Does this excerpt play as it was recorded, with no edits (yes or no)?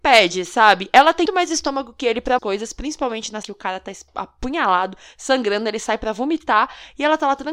no